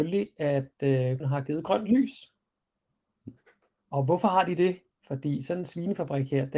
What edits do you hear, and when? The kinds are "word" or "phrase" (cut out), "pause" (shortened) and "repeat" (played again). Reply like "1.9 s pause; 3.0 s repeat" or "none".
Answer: 1.2 s word